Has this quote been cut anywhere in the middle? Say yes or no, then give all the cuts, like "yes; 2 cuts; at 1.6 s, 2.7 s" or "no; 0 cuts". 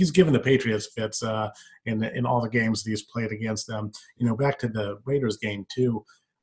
no; 0 cuts